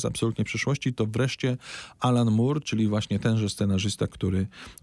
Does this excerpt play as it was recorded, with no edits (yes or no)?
yes